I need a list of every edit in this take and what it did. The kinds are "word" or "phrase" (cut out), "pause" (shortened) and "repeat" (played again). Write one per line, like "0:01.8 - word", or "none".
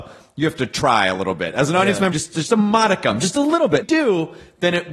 0:02.1 - word
0:03.8 - phrase